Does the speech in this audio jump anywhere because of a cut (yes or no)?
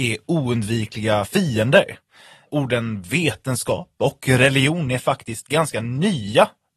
no